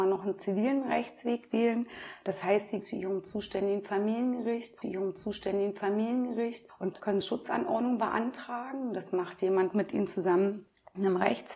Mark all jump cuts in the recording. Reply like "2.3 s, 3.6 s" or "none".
2.8 s, 4.8 s, 7.2 s

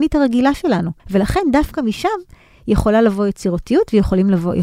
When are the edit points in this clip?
1.0 s

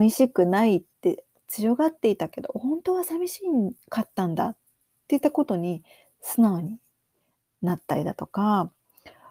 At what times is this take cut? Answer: 3.8 s

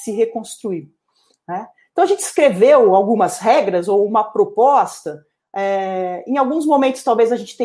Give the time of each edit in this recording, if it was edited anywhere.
none

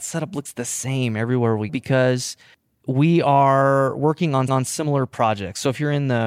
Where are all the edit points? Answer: 1.7 s, 4.5 s

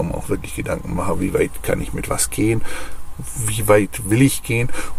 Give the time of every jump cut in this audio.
none

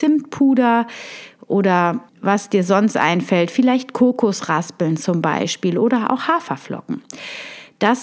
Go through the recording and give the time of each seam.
2.1 s

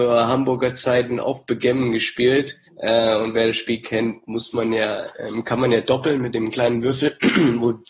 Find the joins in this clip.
2.7 s

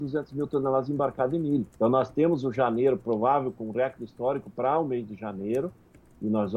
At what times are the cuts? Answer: 1.7 s

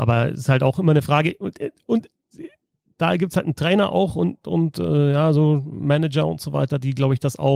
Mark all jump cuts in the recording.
none

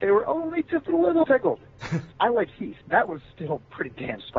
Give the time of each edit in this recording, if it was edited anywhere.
1.2 s, 2.1 s, 2.8 s

